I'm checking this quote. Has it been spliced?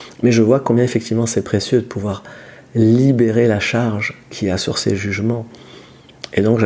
no; 0 cuts

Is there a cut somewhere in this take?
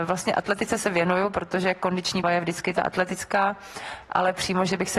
yes; 1 cut; at 2.2 s

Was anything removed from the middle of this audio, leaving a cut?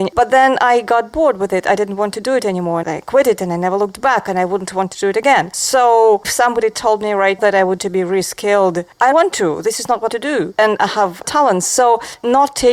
yes; 7 cuts; at 2.8 s, 6.2 s, 7.4 s, 7.8 s, 9.1 s, 10.1 s, 11.2 s

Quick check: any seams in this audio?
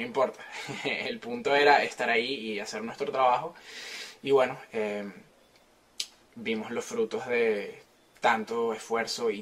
no; 0 cuts

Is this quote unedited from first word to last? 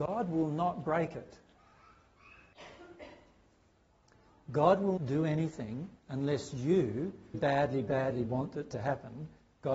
no; 4 cuts; at 5.0 s, 6.0 s, 7.3 s, 8.3 s

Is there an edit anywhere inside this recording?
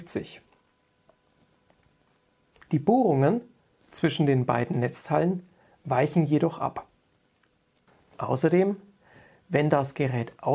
no; 0 cuts

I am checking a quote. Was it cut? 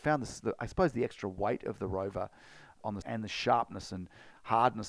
yes; 1 cut; at 3.0 s

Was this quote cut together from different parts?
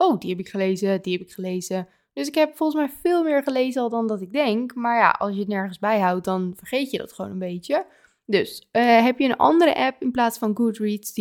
no; 0 cuts

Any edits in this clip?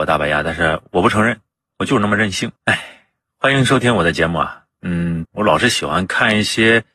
yes; 2 cuts; at 2.6 s, 5.2 s

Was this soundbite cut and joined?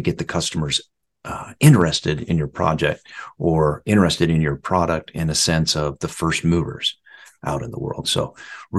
no; 0 cuts

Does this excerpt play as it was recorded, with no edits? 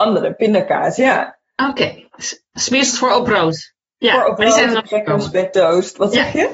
yes; 0 cuts

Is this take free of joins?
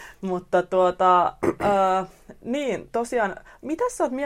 yes; 0 cuts

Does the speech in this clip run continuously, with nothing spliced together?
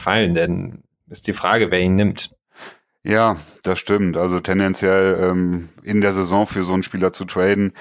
yes; 0 cuts

